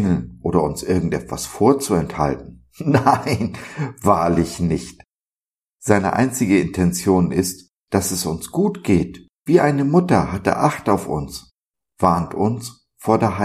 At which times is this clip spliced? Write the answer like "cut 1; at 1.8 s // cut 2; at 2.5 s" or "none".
cut 1; at 9.3 s